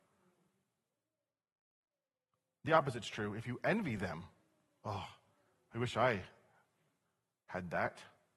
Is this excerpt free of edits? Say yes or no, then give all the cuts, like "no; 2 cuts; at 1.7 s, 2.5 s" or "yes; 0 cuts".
yes; 0 cuts